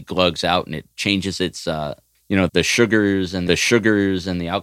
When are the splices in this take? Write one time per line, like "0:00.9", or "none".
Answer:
0:00.9
0:02.1
0:02.5
0:03.5